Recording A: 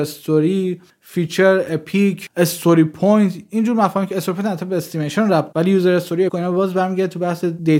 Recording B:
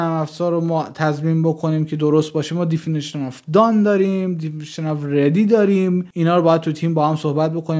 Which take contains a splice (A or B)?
A